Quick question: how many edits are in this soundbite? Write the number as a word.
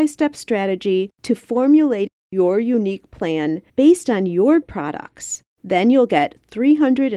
four